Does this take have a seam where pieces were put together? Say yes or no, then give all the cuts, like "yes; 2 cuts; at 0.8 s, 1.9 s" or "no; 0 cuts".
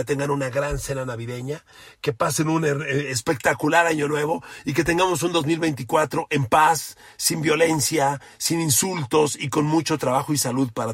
no; 0 cuts